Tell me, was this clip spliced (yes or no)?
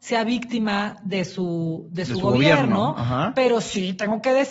no